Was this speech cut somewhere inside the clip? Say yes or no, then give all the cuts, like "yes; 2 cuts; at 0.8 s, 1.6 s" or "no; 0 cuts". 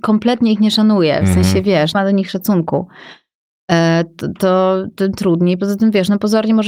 yes; 1 cut; at 1.9 s